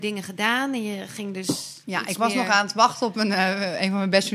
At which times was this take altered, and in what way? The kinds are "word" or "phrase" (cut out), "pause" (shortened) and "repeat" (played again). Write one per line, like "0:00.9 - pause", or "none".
0:01.8 - pause